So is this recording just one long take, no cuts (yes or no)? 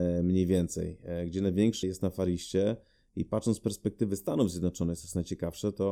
no